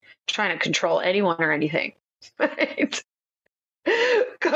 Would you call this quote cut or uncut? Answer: uncut